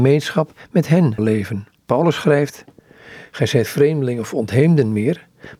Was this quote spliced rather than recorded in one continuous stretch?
yes; 3 cuts; at 1.2 s, 1.7 s, 3.7 s

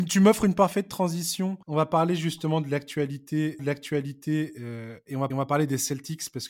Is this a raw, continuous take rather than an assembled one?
no; 3 cuts; at 1.6 s, 3.6 s, 5.3 s

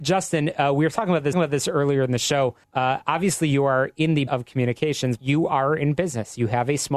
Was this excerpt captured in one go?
no; 4 cuts; at 1.3 s, 2.6 s, 4.3 s, 5.2 s

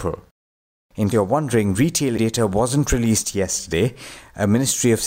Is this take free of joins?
no; 2 cuts; at 1.1 s, 2.2 s

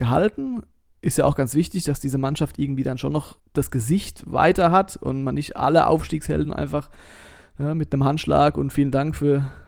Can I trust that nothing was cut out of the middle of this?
yes; 0 cuts

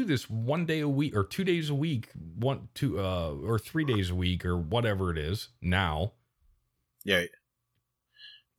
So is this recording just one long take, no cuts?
yes; 0 cuts

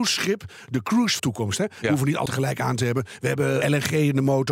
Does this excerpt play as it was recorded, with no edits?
no; 3 cuts; at 1.2 s, 2.3 s, 3.6 s

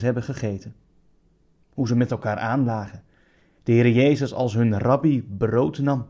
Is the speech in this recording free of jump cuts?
yes; 0 cuts

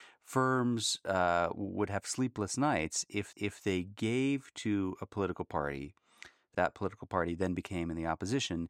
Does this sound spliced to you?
yes; 2 cuts; at 3.3 s, 6.5 s

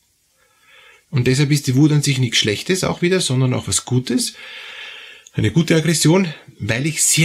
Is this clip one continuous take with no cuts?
yes; 0 cuts

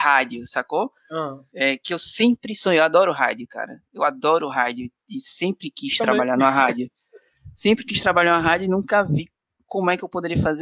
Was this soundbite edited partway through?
no; 0 cuts

